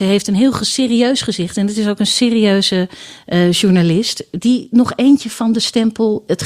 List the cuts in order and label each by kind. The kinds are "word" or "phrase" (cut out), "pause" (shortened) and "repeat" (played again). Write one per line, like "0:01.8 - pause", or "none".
none